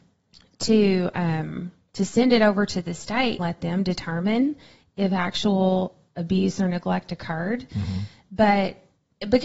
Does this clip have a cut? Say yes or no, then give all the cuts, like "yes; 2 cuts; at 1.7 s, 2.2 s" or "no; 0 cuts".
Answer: yes; 1 cut; at 3.4 s